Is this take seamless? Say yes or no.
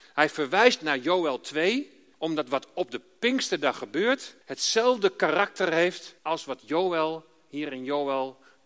no